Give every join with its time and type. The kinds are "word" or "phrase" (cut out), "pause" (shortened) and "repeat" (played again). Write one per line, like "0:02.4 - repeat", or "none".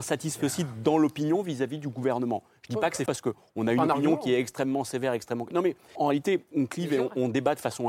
0:03.1 - word
0:06.0 - word
0:06.5 - word